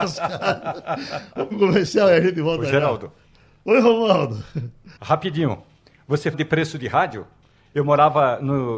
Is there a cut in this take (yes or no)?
yes